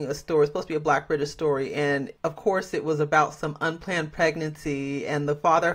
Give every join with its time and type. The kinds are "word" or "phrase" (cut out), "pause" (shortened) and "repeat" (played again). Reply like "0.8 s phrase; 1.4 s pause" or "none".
2.2 s pause